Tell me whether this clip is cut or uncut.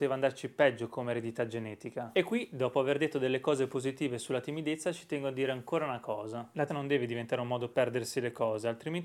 cut